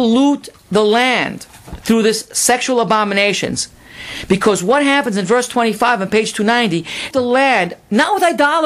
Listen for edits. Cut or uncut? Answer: cut